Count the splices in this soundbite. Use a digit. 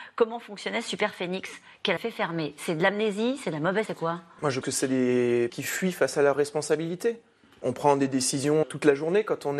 6